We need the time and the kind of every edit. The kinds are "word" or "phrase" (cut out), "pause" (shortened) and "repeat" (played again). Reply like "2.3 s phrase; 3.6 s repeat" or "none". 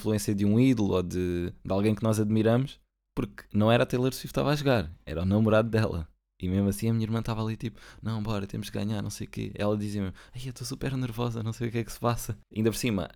2.9 s pause